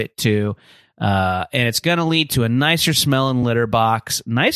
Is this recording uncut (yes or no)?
yes